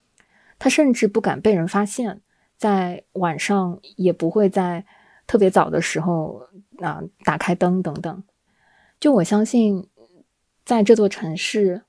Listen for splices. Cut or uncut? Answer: uncut